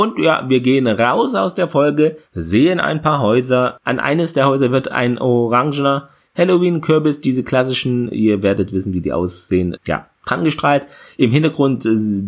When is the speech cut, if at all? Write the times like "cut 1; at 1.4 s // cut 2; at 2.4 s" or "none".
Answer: cut 1; at 2.3 s // cut 2; at 9.8 s